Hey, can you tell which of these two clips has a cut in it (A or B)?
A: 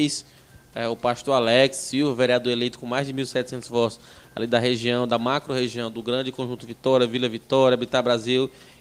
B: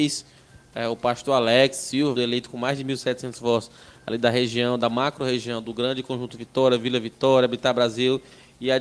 B